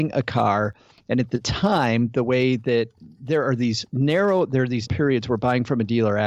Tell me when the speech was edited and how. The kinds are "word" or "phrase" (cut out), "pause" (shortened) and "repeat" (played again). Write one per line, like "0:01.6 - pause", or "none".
0:04.9 - word